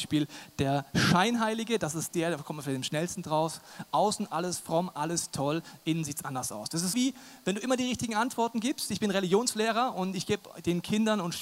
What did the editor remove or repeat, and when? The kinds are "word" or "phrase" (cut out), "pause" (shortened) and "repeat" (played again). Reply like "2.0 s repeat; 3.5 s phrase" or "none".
6.9 s word